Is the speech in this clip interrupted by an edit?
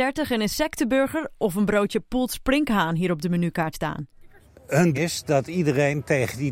yes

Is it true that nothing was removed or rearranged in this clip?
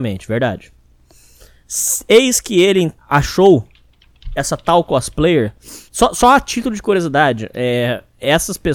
no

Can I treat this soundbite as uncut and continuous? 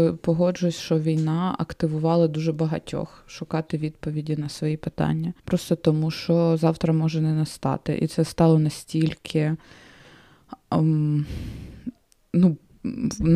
no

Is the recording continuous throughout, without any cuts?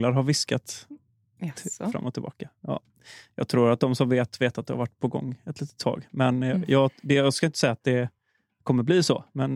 yes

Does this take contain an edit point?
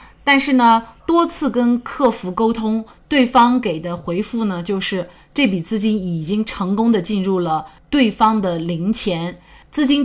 no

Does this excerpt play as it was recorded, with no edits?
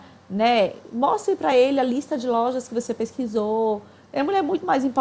yes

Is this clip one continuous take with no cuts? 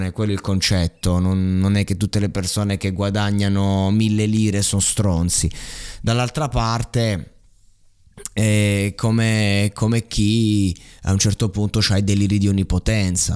yes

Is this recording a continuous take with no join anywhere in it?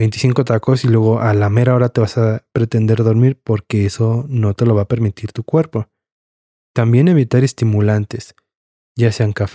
yes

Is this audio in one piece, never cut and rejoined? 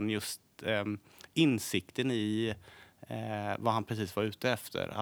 yes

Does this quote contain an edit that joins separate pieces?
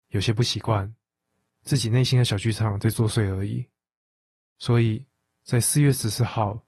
no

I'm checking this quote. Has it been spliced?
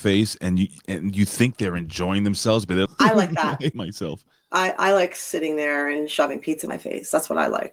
yes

